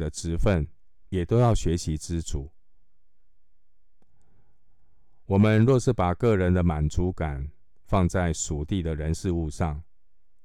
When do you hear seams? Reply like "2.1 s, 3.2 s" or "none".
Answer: 1.1 s